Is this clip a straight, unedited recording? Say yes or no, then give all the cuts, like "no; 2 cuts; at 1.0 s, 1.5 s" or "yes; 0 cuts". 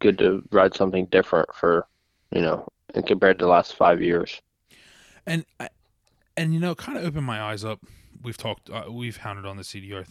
yes; 0 cuts